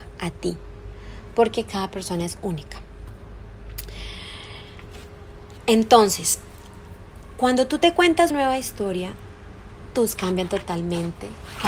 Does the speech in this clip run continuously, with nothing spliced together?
no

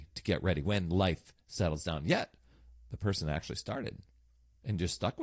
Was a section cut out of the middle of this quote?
no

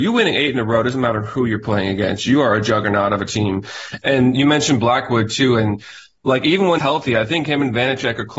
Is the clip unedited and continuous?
no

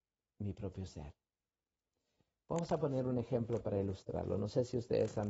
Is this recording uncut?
yes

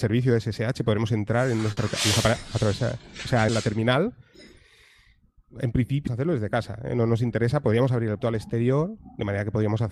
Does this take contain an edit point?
yes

